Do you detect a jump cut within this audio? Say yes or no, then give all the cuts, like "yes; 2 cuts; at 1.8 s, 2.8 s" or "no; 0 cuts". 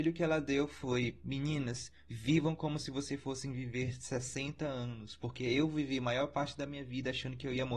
no; 0 cuts